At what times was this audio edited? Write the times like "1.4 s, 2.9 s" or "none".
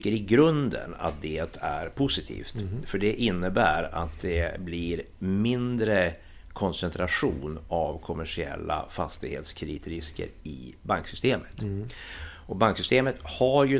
none